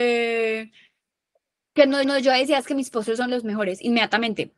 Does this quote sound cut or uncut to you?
cut